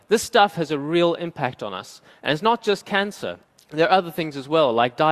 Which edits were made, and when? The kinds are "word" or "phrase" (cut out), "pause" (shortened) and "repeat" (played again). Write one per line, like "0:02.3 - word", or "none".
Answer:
0:03.4 - pause